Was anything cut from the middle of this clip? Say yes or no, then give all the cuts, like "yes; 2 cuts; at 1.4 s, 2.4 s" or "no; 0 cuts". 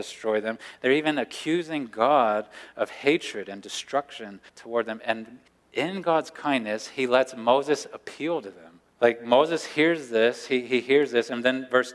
yes; 3 cuts; at 4.5 s, 5.5 s, 8.9 s